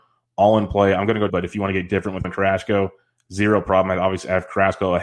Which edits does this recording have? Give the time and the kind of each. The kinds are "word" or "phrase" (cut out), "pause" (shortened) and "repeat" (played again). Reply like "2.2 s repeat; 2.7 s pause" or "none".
1.3 s word; 2.2 s word